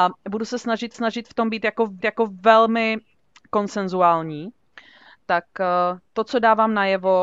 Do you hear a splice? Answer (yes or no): yes